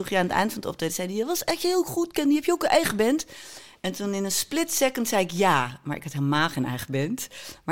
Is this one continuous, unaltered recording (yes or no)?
yes